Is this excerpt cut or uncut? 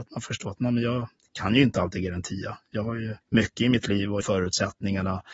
cut